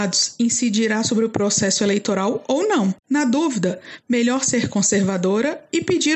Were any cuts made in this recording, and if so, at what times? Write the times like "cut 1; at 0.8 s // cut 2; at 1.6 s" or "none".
cut 1; at 3.0 s